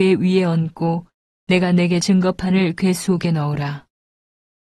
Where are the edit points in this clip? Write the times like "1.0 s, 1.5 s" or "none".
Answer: 2.0 s